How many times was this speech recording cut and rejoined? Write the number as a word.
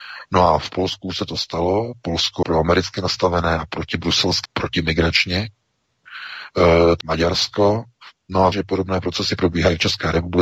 four